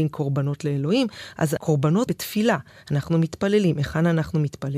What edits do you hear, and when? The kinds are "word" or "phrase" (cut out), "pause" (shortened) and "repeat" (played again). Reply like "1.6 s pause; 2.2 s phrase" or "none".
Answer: 2.1 s word